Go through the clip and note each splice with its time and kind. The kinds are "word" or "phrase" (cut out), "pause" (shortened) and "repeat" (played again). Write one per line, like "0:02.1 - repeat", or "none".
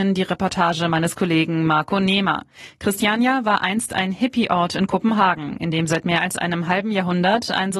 none